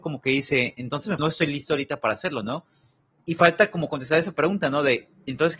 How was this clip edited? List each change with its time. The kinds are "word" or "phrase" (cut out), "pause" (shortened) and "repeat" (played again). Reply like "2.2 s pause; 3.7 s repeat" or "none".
1.2 s phrase